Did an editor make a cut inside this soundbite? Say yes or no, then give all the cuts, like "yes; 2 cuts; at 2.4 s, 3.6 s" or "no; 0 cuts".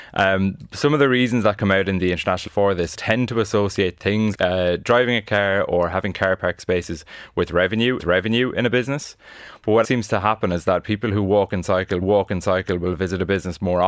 yes; 6 cuts; at 2.5 s, 2.9 s, 4.3 s, 8.0 s, 9.8 s, 12.0 s